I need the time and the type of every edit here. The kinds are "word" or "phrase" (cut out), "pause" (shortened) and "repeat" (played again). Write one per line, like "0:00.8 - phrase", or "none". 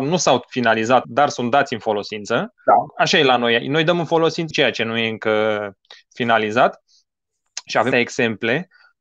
0:01.0 - word
0:04.5 - word
0:07.9 - word